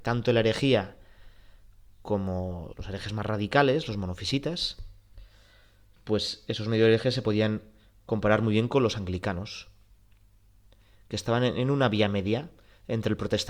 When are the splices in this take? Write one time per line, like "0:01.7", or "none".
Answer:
0:02.7

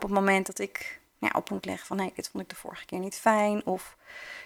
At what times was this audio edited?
0:01.5

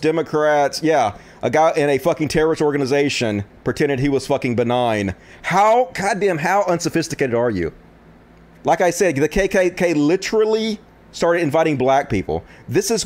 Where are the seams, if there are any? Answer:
none

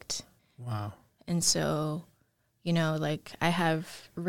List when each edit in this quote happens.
none

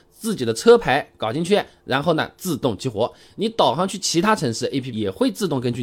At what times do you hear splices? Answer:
0:04.9

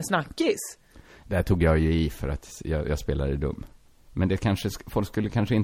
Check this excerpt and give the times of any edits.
0:03.8

